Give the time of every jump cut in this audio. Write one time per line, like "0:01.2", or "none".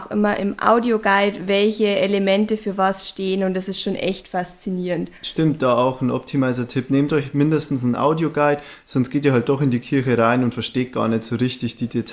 0:05.2

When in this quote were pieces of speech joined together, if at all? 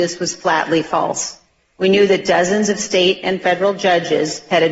0:01.6

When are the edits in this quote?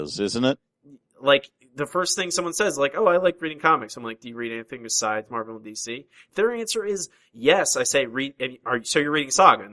none

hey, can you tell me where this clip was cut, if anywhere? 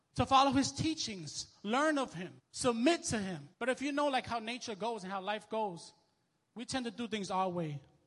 0:02.4
0:03.5

